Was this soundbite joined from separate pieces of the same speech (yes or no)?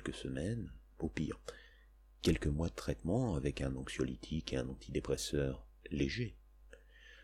no